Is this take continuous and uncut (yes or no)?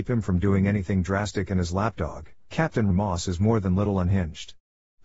no